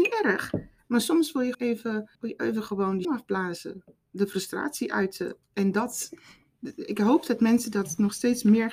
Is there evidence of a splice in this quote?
yes; 4 cuts; at 1.5 s, 2.1 s, 3.0 s, 5.4 s

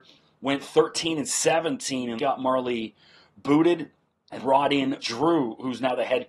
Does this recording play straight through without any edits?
no; 3 cuts; at 2.2 s, 4.4 s, 5.0 s

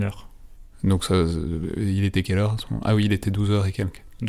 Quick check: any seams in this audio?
no; 0 cuts

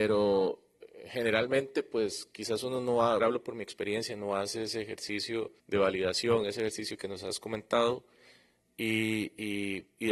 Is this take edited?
yes; 2 cuts; at 3.2 s, 5.6 s

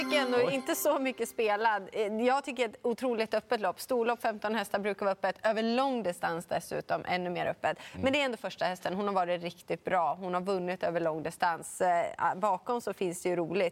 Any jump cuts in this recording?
no; 0 cuts

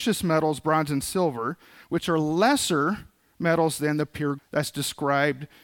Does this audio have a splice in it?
yes; 1 cut; at 4.4 s

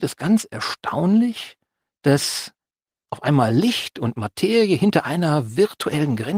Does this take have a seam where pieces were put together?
no; 0 cuts

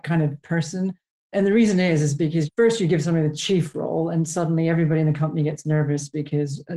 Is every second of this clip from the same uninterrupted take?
yes; 0 cuts

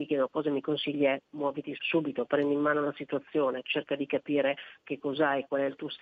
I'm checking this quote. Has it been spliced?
yes; 1 cut; at 1.8 s

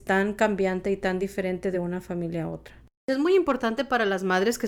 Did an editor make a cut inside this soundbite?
no; 0 cuts

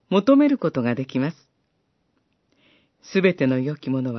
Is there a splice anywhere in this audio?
no; 0 cuts

